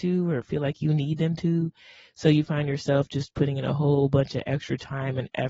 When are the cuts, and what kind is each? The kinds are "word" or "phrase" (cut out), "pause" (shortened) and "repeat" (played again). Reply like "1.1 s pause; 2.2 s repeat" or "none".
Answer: none